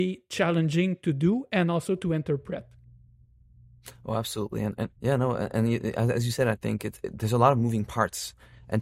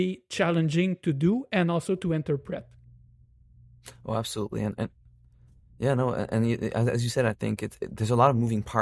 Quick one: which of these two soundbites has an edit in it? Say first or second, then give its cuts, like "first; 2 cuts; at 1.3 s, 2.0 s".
first; 1 cut; at 5.0 s